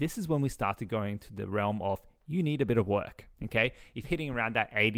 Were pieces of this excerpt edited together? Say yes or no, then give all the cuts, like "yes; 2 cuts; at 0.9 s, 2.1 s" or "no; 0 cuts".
yes; 2 cuts; at 3.3 s, 4.0 s